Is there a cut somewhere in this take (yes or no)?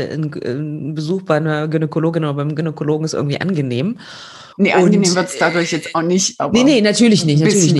yes